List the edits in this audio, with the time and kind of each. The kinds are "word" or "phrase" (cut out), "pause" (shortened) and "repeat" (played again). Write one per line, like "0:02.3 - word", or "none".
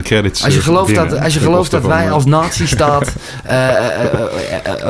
none